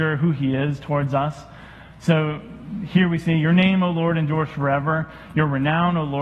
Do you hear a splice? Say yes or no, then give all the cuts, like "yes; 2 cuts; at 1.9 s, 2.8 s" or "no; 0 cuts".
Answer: no; 0 cuts